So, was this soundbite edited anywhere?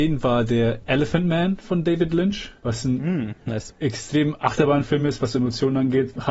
no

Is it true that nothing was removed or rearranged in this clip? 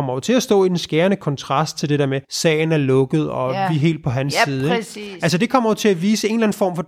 no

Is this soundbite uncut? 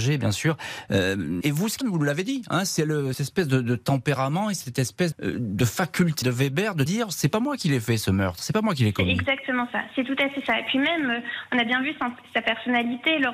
no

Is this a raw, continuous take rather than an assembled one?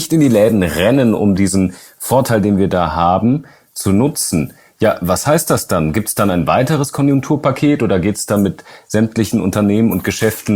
yes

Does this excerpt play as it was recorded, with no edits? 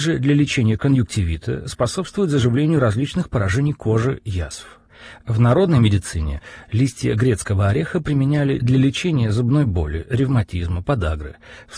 yes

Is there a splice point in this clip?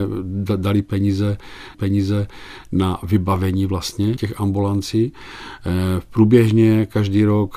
yes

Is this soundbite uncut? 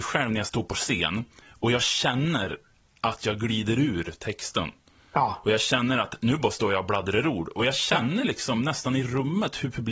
yes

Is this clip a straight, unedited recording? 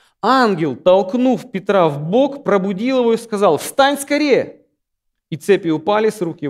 yes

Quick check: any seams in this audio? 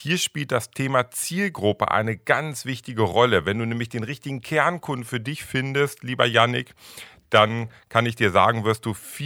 no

